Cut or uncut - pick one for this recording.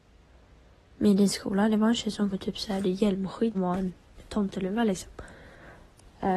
cut